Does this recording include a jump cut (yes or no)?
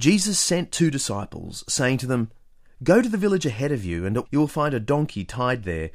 yes